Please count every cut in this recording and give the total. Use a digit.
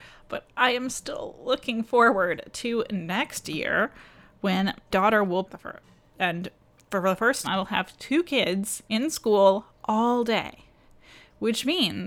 4